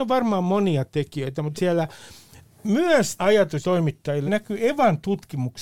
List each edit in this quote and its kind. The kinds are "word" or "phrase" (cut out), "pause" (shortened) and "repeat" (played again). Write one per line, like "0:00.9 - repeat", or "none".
0:01.6 - word
0:03.2 - word
0:03.6 - word
0:04.3 - word